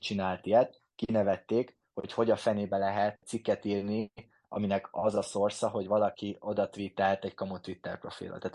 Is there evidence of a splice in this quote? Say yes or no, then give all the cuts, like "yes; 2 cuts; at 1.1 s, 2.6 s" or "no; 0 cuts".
no; 0 cuts